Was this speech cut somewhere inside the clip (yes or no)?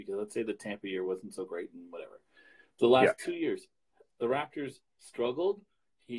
no